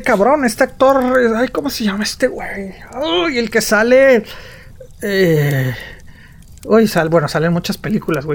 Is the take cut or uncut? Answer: uncut